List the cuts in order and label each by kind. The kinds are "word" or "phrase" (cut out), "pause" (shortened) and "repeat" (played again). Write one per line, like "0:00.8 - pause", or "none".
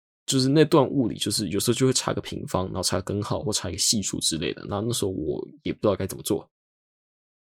none